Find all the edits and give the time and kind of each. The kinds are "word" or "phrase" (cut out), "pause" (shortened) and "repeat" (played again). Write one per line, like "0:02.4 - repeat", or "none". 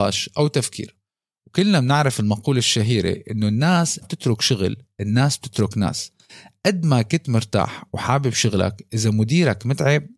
0:04.0 - word